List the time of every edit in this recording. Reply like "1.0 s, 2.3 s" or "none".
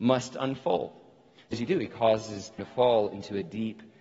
1.5 s, 2.6 s